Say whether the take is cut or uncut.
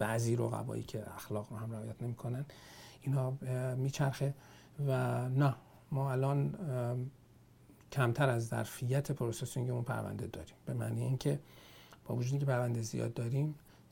uncut